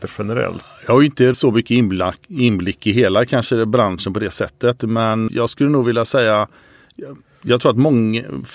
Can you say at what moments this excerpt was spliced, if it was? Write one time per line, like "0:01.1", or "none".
0:01.3
0:05.3